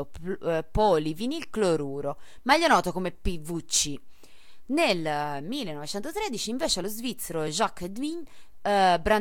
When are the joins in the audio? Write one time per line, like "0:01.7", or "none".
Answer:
none

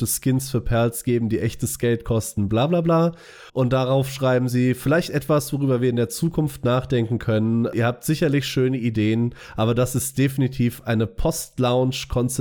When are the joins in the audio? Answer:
0:03.5

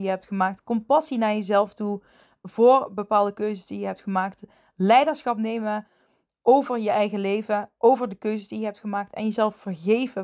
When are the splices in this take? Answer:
none

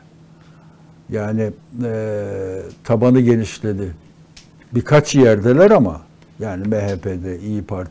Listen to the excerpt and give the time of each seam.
none

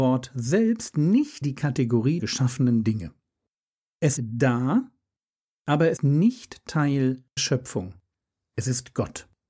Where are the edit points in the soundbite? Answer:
0:01.4
0:02.2
0:04.2
0:06.0
0:07.4

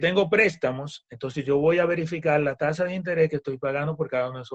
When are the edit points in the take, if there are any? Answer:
none

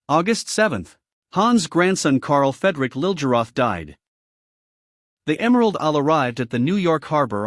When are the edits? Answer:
none

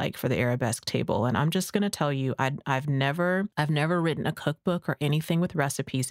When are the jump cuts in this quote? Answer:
0:03.5

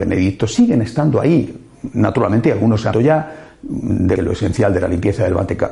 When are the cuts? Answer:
0:02.9
0:04.2

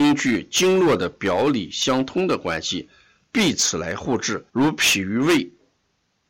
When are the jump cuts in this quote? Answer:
0:04.5

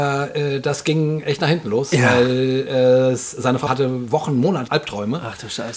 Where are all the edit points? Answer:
0:03.7
0:04.7

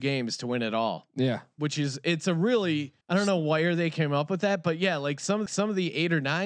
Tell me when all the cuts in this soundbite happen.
0:03.0
0:05.5

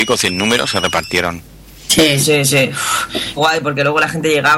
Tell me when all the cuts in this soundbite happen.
0:03.4

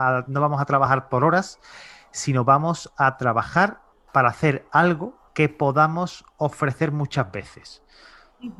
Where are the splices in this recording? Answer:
0:03.9
0:05.3

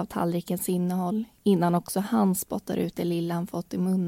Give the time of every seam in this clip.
none

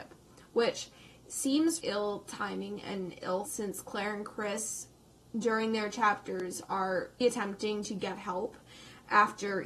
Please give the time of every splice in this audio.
0:01.8
0:03.5
0:07.2

